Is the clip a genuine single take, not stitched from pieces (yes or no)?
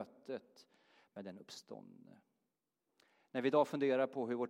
no